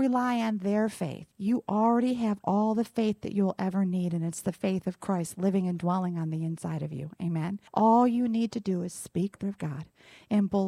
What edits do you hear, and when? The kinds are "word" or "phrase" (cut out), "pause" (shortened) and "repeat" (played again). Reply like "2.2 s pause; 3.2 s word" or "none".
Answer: 1.3 s pause; 7.7 s pause; 9.4 s word